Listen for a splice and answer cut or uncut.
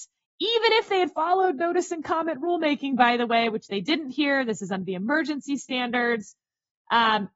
uncut